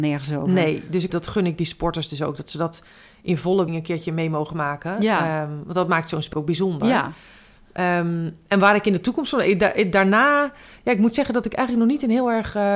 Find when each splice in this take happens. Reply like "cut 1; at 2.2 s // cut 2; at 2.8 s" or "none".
cut 1; at 1.1 s // cut 2; at 3.7 s // cut 3; at 6.3 s